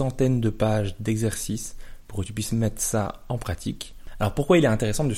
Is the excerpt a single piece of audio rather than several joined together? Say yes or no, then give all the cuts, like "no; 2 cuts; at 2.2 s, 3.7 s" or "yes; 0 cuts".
yes; 0 cuts